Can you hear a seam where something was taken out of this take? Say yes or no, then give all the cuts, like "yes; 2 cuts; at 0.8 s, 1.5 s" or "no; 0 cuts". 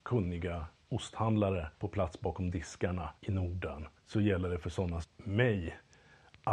yes; 4 cuts; at 1.7 s, 3.2 s, 4.0 s, 5.0 s